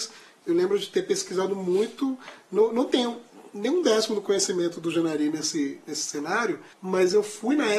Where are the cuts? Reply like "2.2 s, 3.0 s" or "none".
6.7 s